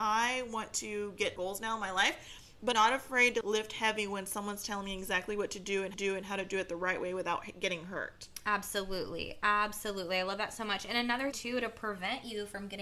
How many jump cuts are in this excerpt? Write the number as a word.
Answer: five